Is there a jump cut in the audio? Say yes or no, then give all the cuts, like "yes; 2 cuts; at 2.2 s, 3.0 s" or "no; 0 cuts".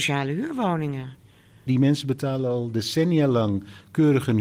no; 0 cuts